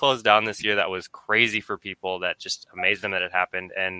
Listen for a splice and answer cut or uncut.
uncut